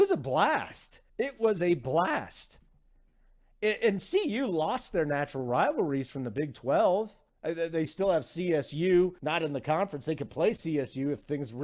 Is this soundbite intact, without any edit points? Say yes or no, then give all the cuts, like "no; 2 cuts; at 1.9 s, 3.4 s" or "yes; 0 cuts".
no; 3 cuts; at 1.1 s, 7.3 s, 9.2 s